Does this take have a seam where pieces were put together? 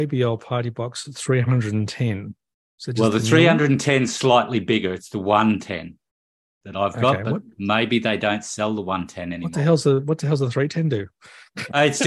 no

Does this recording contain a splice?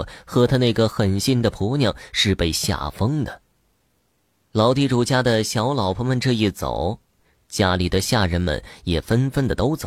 no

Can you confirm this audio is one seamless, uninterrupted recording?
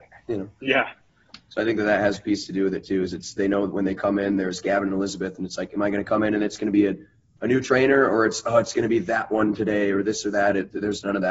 yes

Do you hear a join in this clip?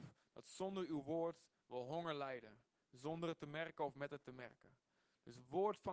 no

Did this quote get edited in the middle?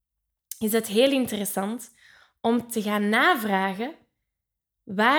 no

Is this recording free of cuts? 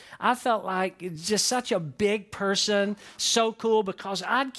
yes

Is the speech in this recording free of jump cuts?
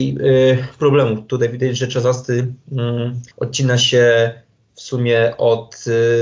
no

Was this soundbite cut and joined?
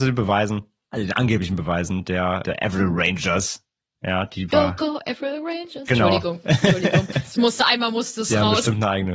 no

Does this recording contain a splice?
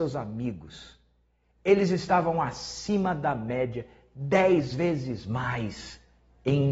no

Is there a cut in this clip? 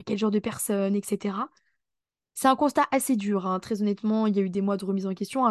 no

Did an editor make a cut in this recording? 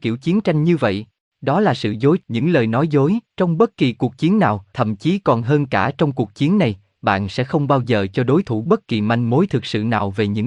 yes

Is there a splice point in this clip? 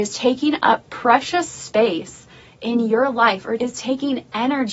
no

